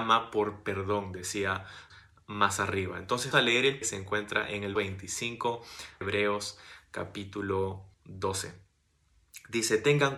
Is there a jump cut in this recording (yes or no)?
yes